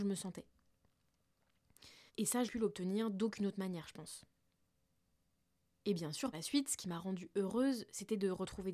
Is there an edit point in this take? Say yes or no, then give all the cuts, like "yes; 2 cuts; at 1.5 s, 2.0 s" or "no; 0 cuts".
yes; 4 cuts; at 2.1 s, 2.4 s, 4.7 s, 6.3 s